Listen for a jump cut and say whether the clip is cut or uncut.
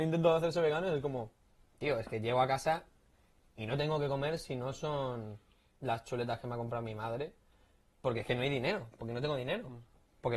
uncut